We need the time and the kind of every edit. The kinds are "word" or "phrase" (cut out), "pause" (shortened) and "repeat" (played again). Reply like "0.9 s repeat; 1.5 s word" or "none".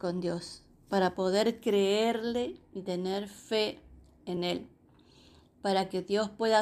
none